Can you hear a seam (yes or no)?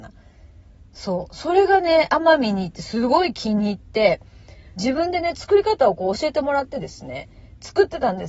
yes